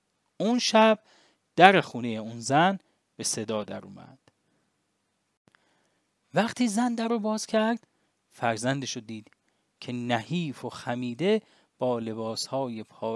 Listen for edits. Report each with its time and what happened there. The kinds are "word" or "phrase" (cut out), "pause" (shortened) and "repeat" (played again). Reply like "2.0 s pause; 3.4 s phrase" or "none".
none